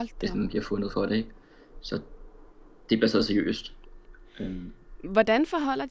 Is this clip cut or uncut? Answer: uncut